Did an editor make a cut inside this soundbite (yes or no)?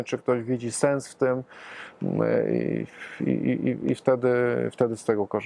no